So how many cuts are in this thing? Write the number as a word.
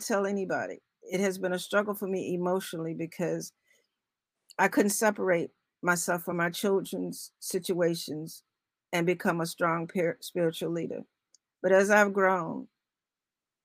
zero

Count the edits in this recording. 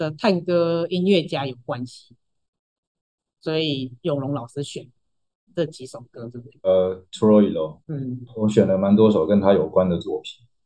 one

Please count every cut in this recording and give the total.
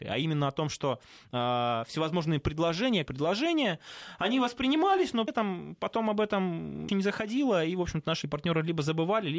four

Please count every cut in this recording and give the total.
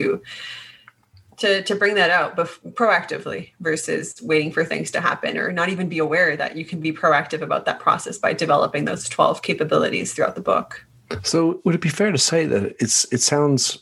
zero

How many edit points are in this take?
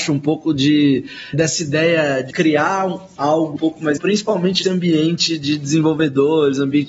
five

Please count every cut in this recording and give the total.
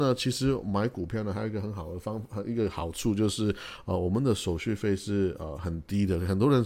zero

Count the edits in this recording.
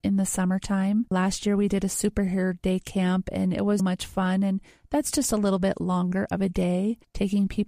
one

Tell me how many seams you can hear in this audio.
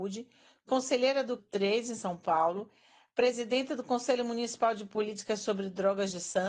one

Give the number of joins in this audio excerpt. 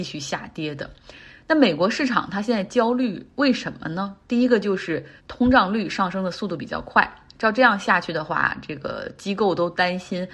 one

